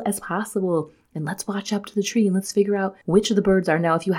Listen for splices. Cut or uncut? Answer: cut